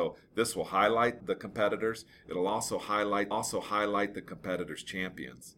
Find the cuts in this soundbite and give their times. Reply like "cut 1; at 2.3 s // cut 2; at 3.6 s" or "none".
cut 1; at 1.2 s // cut 2; at 3.3 s